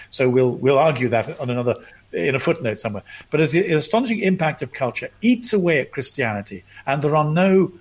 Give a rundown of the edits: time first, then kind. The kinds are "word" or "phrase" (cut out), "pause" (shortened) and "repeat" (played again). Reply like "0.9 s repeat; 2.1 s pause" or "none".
4.7 s word